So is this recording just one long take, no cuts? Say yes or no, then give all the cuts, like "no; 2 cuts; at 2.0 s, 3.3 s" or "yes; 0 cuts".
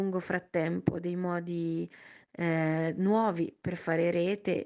yes; 0 cuts